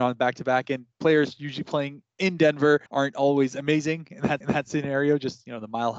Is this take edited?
yes; 2 cuts; at 2.9 s, 4.4 s

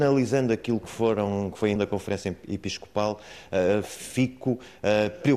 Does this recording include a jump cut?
yes; 1 cut; at 1.8 s

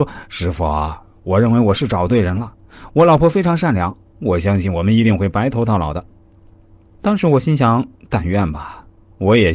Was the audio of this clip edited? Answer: no; 0 cuts

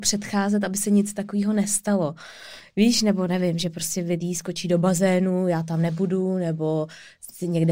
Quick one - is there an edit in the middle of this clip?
no; 0 cuts

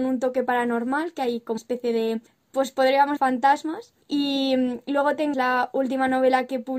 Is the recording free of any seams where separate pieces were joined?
no; 5 cuts; at 1.6 s, 2.3 s, 3.2 s, 4.0 s, 5.3 s

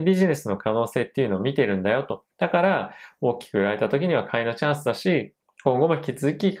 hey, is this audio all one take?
no; 2 cuts; at 2.3 s, 5.4 s

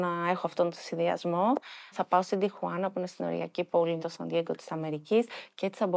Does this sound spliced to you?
yes; 2 cuts; at 1.9 s, 4.0 s

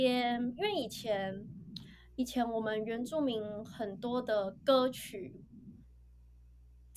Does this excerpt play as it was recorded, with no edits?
yes; 0 cuts

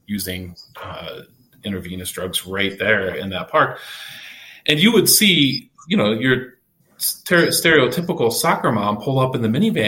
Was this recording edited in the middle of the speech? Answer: no; 0 cuts

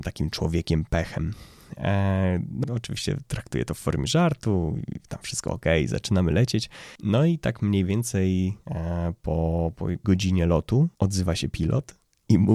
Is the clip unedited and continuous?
no; 5 cuts; at 2.6 s, 7.0 s, 9.7 s, 10.0 s, 10.9 s

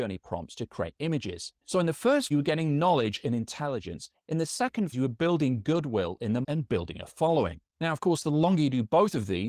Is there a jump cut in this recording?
yes; 3 cuts; at 2.3 s, 4.9 s, 6.4 s

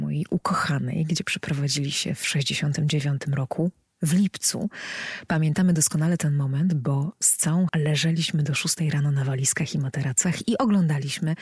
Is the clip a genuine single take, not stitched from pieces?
no; 1 cut; at 7.7 s

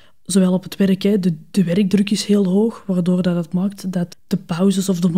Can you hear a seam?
yes; 1 cut; at 4.1 s

